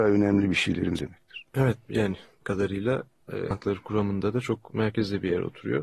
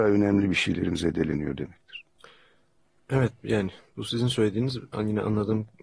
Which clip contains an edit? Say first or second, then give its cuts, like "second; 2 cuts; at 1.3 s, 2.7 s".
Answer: first; 4 cuts; at 1.0 s, 1.5 s, 2.4 s, 3.5 s